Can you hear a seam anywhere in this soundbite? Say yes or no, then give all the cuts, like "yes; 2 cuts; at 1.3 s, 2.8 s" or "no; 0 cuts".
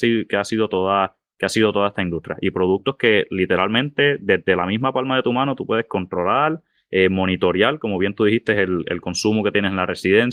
no; 0 cuts